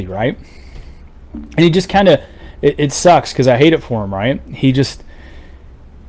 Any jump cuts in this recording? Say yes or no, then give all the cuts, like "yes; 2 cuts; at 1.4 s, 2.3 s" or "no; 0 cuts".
no; 0 cuts